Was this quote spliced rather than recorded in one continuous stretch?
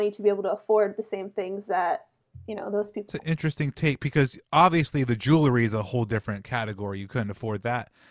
yes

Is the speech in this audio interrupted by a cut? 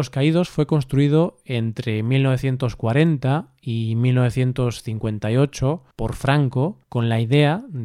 yes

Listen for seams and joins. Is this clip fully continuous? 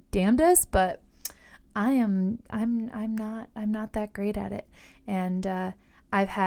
yes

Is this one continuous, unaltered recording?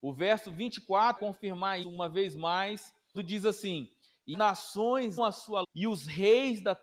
no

